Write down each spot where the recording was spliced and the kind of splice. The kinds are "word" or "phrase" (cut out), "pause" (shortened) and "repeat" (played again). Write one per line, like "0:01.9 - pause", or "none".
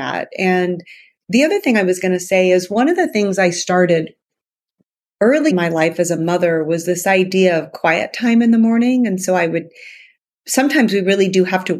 0:05.5 - word